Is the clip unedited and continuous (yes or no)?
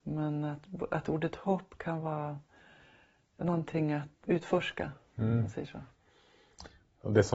no